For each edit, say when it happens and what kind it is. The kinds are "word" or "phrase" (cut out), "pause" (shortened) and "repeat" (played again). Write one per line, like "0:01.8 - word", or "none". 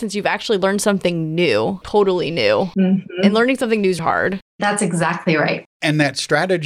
0:01.8 - word
0:04.0 - word
0:04.5 - pause
0:05.7 - pause